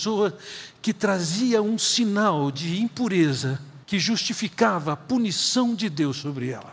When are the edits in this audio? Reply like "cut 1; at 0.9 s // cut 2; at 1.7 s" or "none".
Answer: cut 1; at 3.8 s